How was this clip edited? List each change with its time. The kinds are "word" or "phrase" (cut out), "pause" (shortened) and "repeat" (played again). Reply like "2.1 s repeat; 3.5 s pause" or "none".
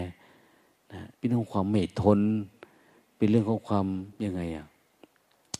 1.1 s pause; 4.1 s pause